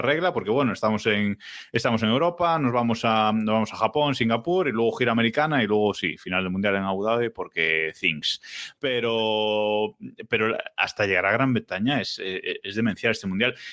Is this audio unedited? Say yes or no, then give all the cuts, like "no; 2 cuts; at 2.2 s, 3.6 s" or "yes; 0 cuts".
yes; 0 cuts